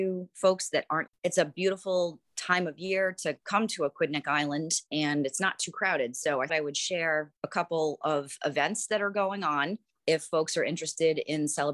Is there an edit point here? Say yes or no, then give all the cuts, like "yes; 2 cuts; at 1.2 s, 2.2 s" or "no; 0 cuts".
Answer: yes; 3 cuts; at 1.1 s, 6.5 s, 7.4 s